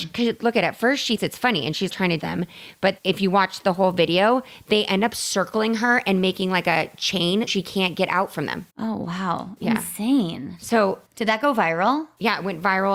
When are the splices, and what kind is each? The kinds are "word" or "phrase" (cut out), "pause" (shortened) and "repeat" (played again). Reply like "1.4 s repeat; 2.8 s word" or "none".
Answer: 1.2 s word; 1.9 s word; 2.2 s phrase; 3.0 s word; 7.5 s word; 8.7 s pause; 11.1 s pause